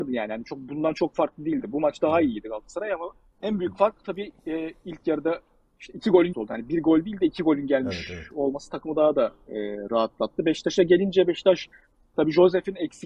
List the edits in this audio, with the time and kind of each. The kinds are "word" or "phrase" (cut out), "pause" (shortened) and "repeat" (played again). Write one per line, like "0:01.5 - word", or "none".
0:06.3 - word